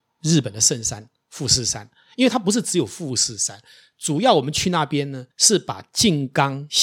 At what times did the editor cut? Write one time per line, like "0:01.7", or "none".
0:05.3